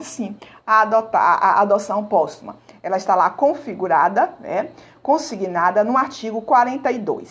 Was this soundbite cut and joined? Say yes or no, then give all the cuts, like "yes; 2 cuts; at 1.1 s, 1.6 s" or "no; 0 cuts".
no; 0 cuts